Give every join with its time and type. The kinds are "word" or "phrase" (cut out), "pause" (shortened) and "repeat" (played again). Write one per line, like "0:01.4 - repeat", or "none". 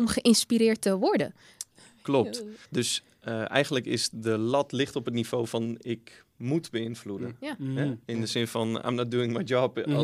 0:02.6 - pause